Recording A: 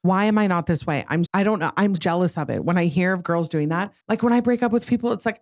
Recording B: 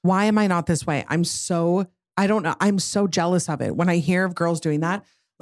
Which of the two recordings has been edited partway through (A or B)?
A